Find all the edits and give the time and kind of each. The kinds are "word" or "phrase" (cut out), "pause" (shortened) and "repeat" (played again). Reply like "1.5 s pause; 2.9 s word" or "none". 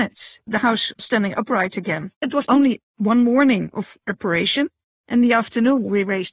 none